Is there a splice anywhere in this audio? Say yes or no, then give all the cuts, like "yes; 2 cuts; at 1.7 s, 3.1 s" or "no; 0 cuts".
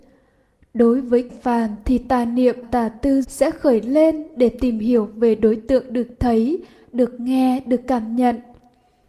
yes; 3 cuts; at 1.3 s, 2.6 s, 3.2 s